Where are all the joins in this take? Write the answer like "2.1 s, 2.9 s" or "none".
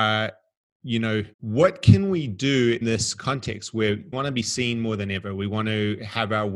1.3 s, 2.8 s, 4.1 s